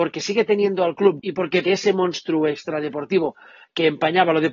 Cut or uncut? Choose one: cut